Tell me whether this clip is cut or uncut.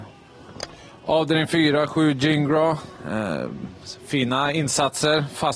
uncut